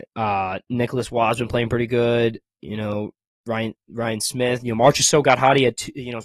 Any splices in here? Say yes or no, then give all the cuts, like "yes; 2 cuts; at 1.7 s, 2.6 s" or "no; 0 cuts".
no; 0 cuts